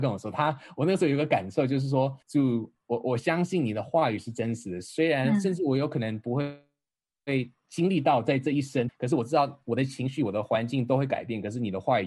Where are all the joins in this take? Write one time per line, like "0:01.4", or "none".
0:02.2
0:08.9